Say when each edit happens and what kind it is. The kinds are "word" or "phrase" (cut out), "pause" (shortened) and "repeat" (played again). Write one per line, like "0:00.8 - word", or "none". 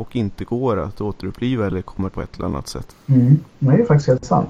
0:02.1 - word